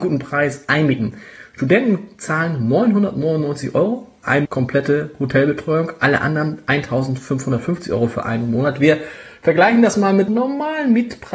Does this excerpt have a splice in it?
yes; 2 cuts; at 4.5 s, 10.3 s

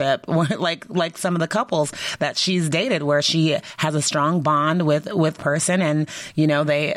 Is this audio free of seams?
no; 1 cut; at 5.4 s

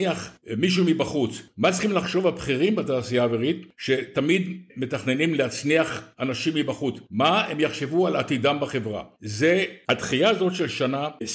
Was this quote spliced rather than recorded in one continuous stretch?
no; 0 cuts

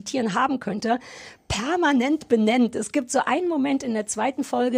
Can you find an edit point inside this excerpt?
no; 0 cuts

